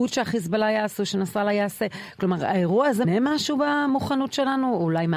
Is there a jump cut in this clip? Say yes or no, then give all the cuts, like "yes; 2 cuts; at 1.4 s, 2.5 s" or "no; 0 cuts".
yes; 1 cut; at 3.0 s